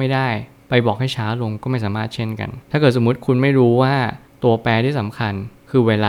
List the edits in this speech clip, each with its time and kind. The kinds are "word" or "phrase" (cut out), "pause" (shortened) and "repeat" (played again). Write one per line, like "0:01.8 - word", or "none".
none